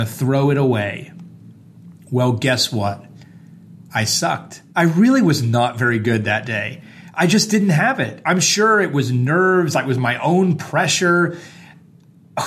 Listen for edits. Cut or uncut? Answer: cut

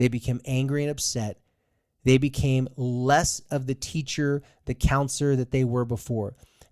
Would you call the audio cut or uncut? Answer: uncut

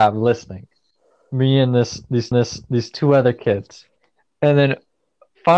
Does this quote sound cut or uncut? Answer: cut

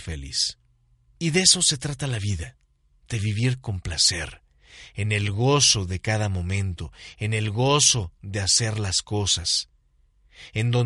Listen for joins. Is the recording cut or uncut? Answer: uncut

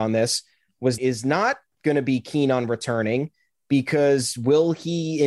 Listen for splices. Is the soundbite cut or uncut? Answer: cut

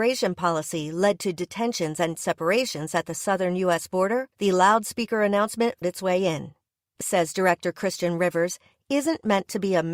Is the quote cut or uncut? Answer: cut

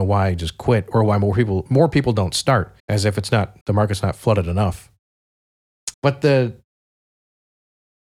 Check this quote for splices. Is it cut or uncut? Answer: cut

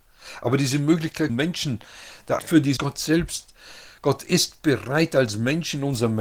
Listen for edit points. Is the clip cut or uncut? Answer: cut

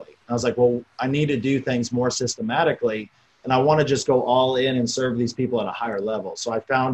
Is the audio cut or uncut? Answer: uncut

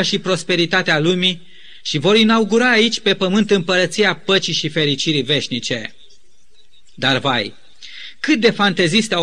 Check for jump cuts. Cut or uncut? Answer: uncut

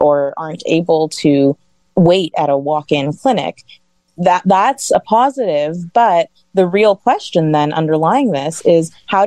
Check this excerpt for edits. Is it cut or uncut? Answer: uncut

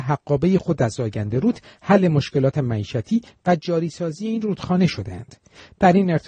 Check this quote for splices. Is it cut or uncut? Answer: uncut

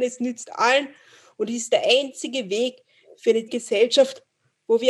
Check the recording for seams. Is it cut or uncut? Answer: cut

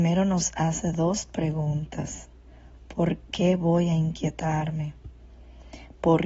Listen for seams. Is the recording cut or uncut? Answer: uncut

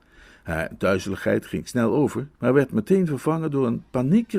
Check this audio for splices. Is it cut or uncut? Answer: cut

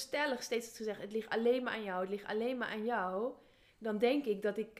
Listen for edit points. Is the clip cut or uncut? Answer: uncut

